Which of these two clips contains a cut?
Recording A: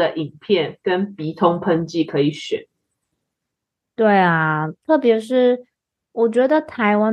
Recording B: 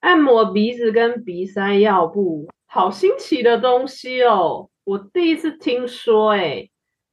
B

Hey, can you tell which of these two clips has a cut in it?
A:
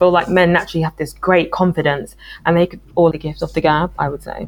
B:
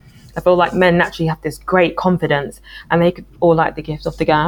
A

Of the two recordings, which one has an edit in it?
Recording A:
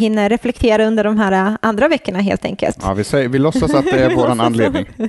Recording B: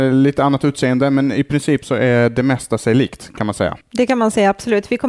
B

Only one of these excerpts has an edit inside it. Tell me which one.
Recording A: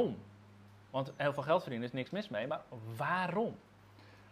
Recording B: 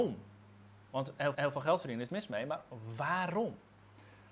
B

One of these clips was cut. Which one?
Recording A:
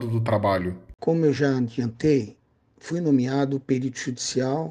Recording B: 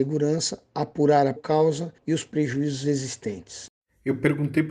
B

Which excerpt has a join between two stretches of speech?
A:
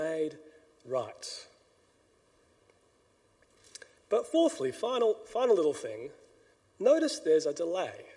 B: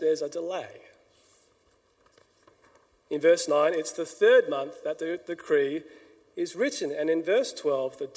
A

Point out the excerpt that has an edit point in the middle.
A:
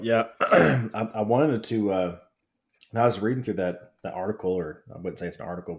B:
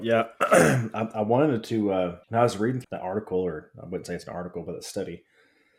B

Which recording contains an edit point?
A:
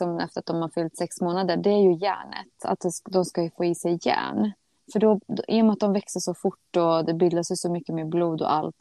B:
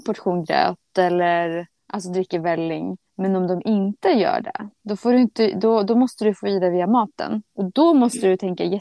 B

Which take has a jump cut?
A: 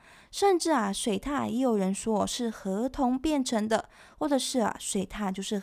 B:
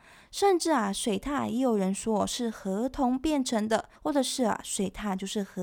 B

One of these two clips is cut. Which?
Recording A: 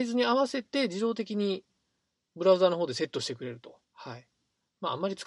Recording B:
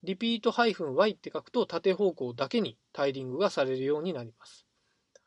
A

